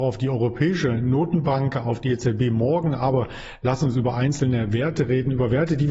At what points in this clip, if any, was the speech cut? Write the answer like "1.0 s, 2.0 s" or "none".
none